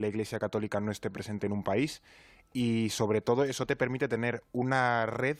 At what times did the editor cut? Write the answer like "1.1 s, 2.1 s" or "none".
none